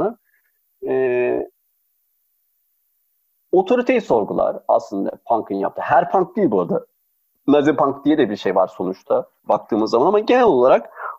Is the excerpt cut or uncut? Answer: uncut